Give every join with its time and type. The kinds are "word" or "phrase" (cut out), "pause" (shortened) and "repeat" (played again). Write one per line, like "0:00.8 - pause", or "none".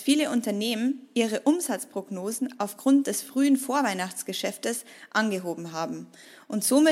none